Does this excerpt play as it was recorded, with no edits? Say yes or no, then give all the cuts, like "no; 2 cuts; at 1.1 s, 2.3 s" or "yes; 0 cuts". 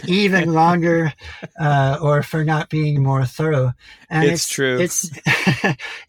no; 1 cut; at 3.0 s